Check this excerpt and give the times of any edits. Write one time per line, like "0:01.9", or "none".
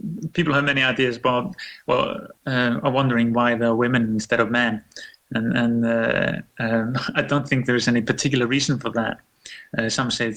0:02.4